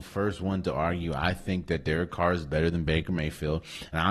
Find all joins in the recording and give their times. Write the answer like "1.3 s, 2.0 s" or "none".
none

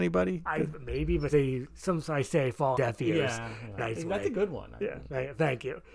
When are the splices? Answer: 1.3 s, 2.0 s, 2.7 s, 3.8 s

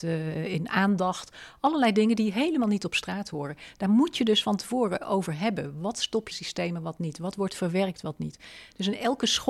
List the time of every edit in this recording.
6.3 s

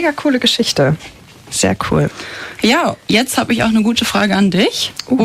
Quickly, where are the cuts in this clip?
3.0 s

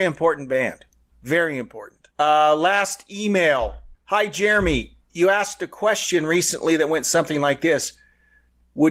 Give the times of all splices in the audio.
2.1 s, 3.9 s, 5.0 s

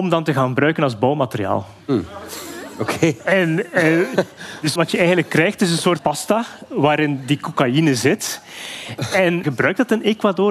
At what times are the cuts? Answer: 4.8 s, 6.0 s, 9.4 s

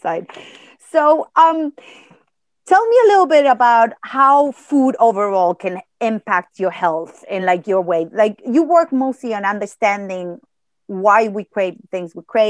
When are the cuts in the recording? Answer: none

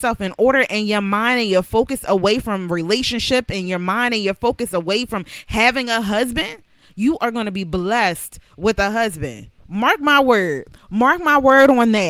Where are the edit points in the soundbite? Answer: 9.6 s

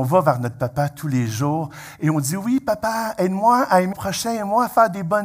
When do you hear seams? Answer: 3.9 s

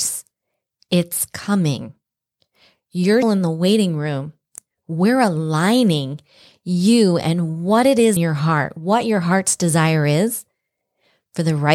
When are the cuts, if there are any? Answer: 3.2 s, 8.2 s

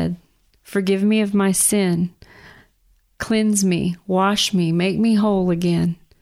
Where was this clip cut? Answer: none

